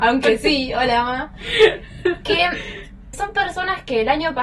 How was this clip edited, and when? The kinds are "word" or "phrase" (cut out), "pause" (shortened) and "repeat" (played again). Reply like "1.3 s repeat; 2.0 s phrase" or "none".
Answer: 3.1 s word